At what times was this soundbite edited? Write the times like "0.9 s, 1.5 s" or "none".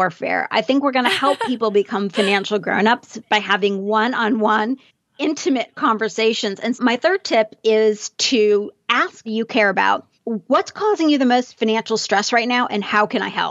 6.7 s, 9.3 s, 10.1 s

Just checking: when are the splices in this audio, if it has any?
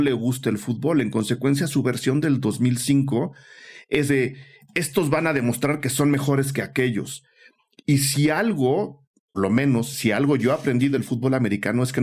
4.1 s, 9.3 s

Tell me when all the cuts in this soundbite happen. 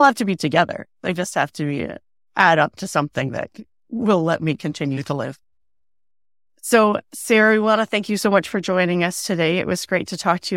none

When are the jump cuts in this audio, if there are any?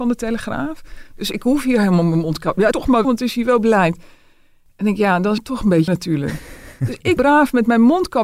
2.7 s, 3.0 s, 5.4 s, 5.9 s, 7.2 s

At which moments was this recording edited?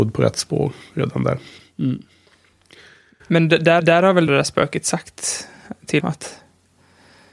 1.6 s, 3.8 s, 4.3 s, 6.0 s

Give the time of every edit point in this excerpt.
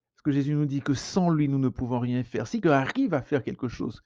2.6 s

